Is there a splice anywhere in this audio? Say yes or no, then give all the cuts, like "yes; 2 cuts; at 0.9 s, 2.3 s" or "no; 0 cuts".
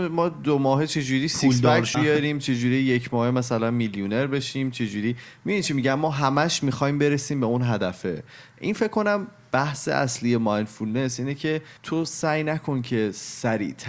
yes; 2 cuts; at 1.9 s, 11.8 s